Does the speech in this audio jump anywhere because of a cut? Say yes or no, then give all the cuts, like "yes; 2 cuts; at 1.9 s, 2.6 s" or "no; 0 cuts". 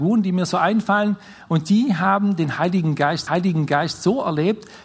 yes; 1 cut; at 3.3 s